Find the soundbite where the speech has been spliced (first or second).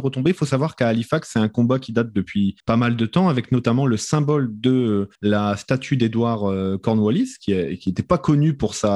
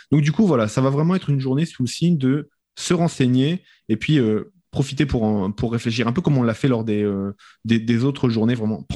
first